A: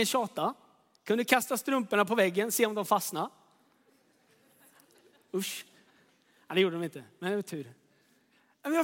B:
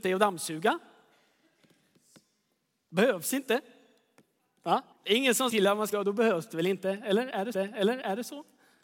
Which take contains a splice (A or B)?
B